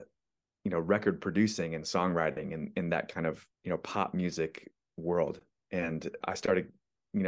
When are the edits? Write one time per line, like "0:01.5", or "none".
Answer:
0:03.5
0:06.2